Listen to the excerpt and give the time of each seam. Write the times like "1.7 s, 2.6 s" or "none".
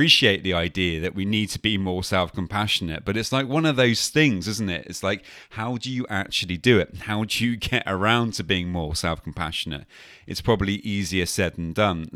none